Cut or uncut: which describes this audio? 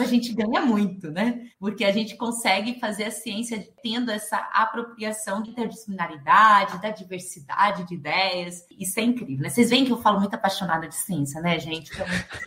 cut